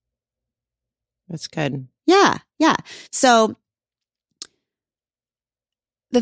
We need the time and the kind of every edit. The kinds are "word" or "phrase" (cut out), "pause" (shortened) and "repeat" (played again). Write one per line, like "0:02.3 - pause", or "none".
0:02.0 - pause
0:03.1 - pause